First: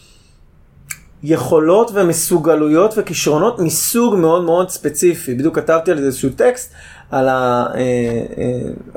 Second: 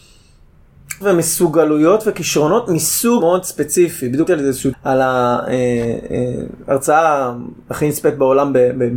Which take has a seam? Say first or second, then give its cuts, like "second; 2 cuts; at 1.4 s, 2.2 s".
second; 4 cuts; at 1.0 s, 3.2 s, 4.3 s, 4.7 s